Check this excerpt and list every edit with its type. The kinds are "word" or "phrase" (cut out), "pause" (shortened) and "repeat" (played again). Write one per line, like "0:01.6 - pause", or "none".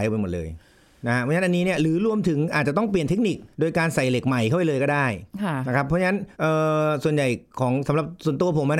0:03.5 - pause
0:06.3 - pause